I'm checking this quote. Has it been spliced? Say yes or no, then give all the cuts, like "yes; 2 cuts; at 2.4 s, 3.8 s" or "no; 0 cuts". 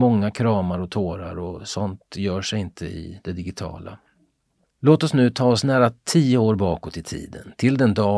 no; 0 cuts